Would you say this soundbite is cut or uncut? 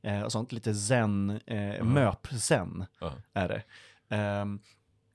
uncut